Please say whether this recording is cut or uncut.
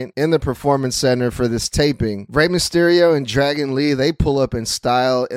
uncut